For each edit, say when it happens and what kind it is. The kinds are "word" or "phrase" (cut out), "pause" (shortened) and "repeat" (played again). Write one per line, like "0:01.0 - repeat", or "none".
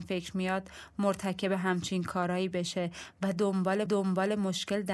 0:03.9 - repeat